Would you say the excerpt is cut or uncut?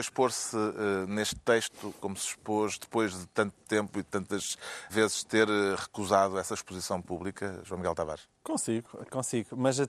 cut